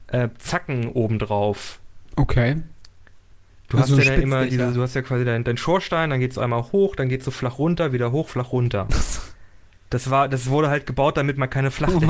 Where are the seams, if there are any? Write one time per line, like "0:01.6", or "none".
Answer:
none